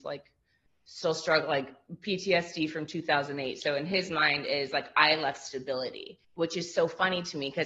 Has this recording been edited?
yes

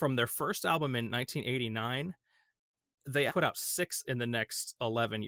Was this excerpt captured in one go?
no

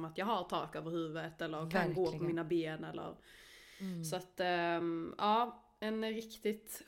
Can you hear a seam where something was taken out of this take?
no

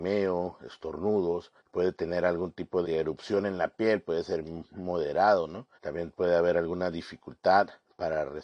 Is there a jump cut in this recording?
yes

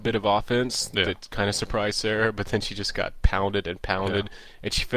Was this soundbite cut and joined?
no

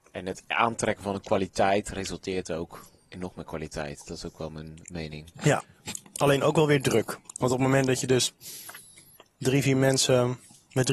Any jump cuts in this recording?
no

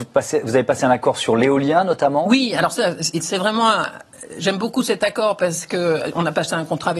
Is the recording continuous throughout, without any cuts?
yes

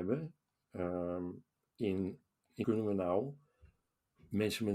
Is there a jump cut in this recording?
yes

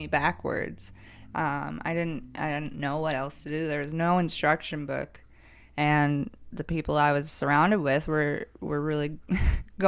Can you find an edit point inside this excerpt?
no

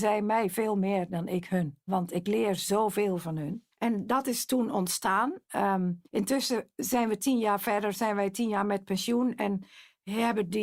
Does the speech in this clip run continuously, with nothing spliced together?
no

